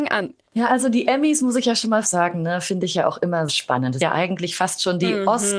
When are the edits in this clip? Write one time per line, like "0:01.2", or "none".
0:02.0
0:03.5
0:04.0